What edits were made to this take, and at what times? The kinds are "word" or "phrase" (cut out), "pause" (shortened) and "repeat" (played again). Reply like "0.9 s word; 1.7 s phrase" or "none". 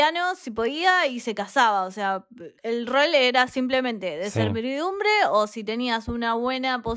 2.6 s pause